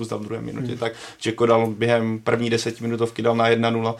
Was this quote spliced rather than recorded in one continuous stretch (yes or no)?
no